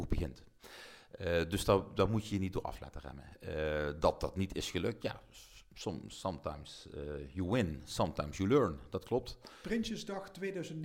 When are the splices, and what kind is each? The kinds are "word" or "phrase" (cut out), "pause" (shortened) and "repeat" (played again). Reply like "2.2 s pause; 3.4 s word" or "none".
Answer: none